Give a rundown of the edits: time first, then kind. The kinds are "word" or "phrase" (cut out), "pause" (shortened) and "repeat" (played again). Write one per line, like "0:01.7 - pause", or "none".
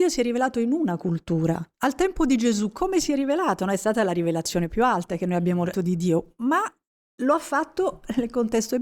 0:01.7 - pause
0:05.7 - word